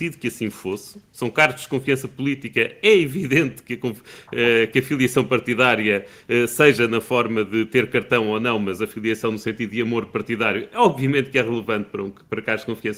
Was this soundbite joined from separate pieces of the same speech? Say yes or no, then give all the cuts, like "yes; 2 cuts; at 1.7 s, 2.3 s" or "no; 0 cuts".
no; 0 cuts